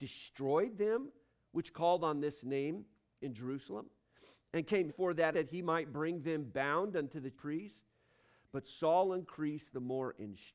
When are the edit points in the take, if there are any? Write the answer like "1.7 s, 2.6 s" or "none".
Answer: 3.2 s, 4.9 s, 5.3 s, 7.3 s